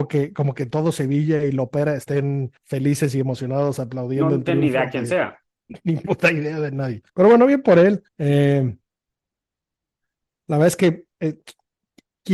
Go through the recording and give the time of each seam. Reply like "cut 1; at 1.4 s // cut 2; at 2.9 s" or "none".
cut 1; at 2.6 s // cut 2; at 7.1 s // cut 3; at 8.1 s